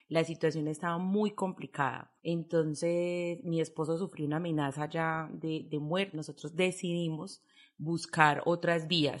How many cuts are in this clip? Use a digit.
2